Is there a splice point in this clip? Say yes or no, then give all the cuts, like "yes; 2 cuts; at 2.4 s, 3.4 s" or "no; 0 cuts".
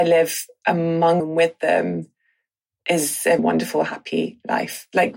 yes; 2 cuts; at 1.2 s, 3.4 s